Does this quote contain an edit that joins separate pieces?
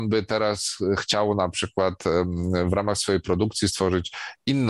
no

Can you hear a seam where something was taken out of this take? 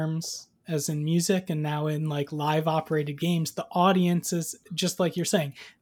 no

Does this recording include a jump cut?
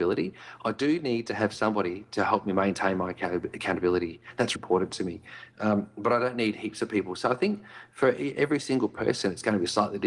yes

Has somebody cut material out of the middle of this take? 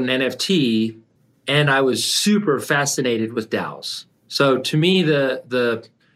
yes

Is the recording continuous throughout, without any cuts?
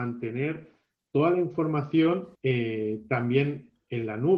no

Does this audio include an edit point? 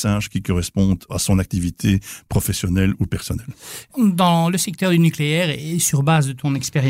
no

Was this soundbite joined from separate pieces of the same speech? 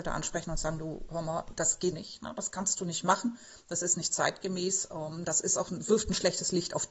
yes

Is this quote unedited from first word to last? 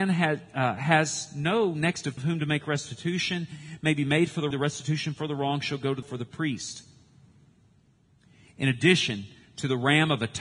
no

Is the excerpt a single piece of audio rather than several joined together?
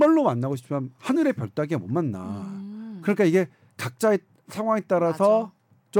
yes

